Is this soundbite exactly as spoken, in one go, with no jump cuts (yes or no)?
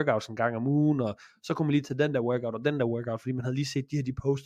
yes